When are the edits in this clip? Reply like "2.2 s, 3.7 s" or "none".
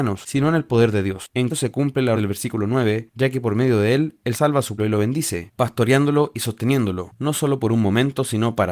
1.5 s, 2.1 s, 4.3 s, 4.8 s